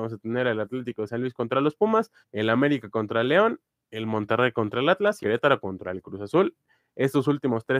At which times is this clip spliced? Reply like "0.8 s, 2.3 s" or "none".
2.2 s, 5.2 s